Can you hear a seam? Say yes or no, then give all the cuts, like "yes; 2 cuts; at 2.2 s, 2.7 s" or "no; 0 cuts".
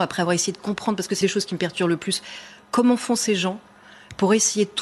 yes; 1 cut; at 1.2 s